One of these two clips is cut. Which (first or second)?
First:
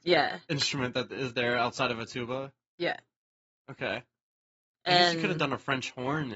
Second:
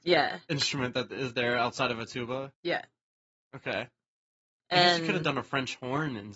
second